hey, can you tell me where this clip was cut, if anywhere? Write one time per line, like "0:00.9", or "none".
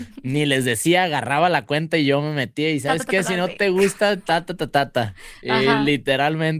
none